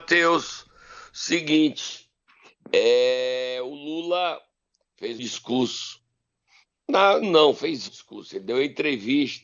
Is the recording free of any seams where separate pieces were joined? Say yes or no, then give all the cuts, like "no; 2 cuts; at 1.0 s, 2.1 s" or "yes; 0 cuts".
no; 3 cuts; at 5.2 s, 7.2 s, 7.9 s